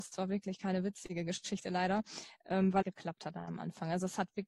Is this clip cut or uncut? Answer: cut